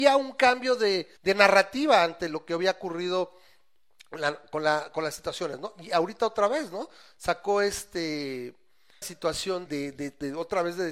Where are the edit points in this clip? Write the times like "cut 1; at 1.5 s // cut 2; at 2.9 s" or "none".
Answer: cut 1; at 1.2 s // cut 2; at 9.0 s // cut 3; at 9.7 s